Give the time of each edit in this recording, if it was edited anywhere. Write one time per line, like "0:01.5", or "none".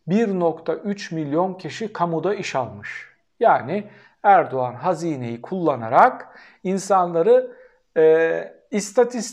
none